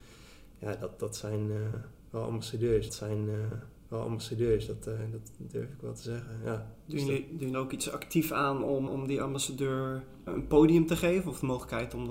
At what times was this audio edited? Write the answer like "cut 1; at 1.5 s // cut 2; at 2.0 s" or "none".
cut 1; at 2.9 s // cut 2; at 7.5 s // cut 3; at 8.9 s // cut 4; at 10.3 s